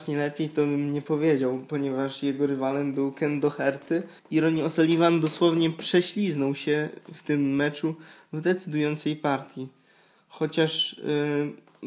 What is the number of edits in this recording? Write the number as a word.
one